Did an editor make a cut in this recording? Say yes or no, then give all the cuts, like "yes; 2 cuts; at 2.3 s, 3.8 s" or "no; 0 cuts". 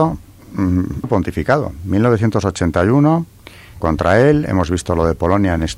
yes; 2 cuts; at 1.0 s, 3.8 s